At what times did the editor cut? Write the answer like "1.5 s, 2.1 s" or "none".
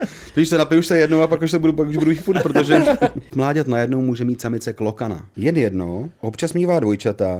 2.2 s, 3.3 s